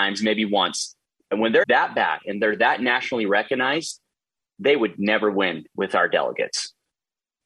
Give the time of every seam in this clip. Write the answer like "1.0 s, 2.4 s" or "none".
1.6 s